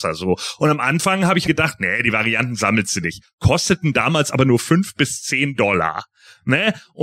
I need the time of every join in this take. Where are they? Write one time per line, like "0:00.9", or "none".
0:01.4